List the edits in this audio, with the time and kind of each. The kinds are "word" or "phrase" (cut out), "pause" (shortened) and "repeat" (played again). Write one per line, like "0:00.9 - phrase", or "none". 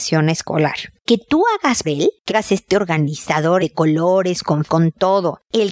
0:01.1 - word
0:01.8 - word
0:02.3 - word
0:03.6 - word
0:04.7 - word